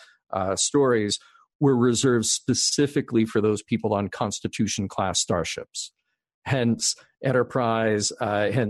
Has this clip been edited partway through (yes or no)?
no